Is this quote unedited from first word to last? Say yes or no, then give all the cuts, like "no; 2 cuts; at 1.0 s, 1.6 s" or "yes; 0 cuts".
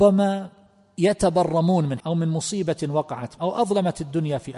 no; 2 cuts; at 2.0 s, 3.4 s